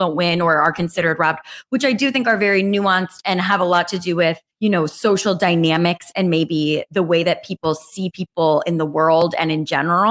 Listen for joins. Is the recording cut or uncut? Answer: cut